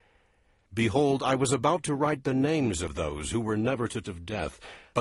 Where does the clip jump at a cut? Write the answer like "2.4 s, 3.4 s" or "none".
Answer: 4.0 s